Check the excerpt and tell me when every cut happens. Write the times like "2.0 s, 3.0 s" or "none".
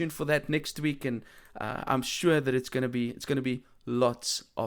none